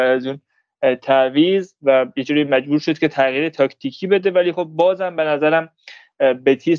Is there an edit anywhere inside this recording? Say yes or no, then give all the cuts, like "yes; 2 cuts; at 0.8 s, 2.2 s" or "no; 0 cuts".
no; 0 cuts